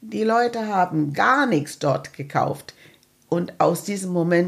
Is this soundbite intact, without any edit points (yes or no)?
no